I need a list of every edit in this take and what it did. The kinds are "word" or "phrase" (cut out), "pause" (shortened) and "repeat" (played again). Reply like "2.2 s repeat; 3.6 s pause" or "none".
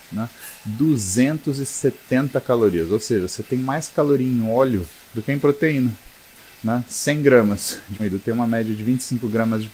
5.0 s pause; 6.4 s pause; 8.0 s word